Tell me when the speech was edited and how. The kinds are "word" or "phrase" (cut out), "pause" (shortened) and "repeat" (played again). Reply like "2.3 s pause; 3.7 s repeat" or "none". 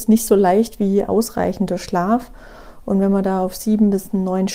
1.1 s word